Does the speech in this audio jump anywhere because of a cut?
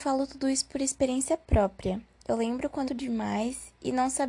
yes; 1 cut; at 2.9 s

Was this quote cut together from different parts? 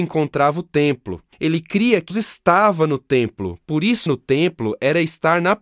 yes; 3 cuts; at 1.3 s, 2.1 s, 4.1 s

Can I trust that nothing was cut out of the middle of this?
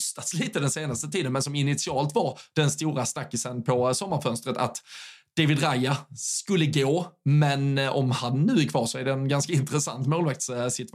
yes; 0 cuts

